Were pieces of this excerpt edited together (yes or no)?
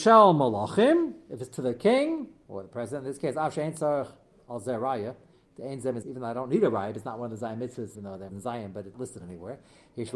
yes